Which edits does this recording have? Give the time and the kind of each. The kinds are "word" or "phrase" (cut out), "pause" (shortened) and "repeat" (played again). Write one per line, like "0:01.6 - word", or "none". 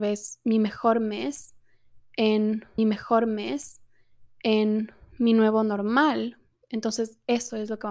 0:02.8 - repeat